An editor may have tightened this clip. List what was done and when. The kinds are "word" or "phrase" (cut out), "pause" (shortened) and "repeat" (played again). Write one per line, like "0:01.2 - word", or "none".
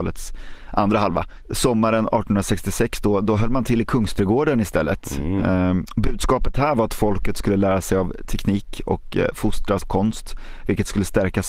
0:09.8 - word